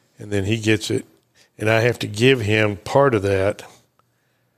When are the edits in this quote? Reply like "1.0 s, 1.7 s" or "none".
none